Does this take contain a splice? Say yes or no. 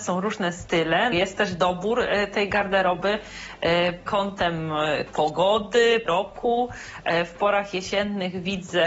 yes